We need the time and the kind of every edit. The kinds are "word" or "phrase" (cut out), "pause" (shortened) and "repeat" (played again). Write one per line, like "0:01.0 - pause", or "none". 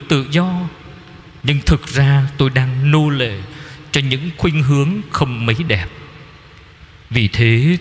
none